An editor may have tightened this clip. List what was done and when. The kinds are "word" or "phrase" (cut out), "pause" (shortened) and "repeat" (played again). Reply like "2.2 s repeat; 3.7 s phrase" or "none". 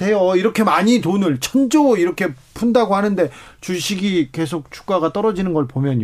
none